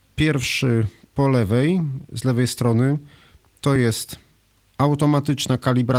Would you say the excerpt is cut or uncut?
uncut